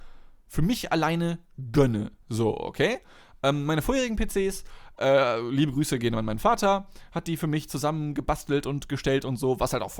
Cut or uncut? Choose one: cut